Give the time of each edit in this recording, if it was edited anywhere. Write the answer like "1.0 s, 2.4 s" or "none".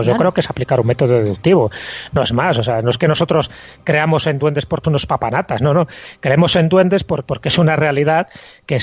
4.8 s, 7.3 s